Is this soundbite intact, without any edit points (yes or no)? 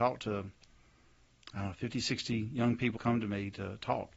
no